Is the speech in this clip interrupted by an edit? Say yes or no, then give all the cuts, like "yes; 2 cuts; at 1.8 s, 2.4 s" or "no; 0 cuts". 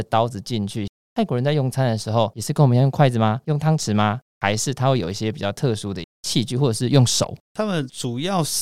yes; 1 cut; at 7.4 s